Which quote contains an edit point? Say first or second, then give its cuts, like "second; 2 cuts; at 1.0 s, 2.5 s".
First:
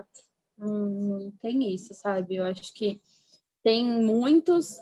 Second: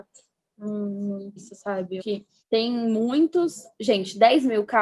second; 3 cuts; at 1.4 s, 2.0 s, 2.4 s